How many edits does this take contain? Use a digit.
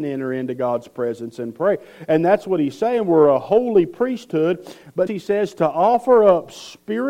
1